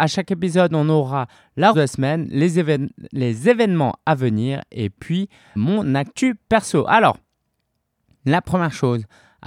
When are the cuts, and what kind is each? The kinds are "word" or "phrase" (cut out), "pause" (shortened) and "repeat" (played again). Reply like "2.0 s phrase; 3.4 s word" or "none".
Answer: 1.7 s word; 5.6 s word